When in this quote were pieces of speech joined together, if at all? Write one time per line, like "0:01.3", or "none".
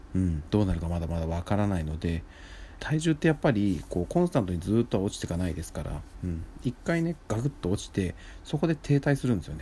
0:02.8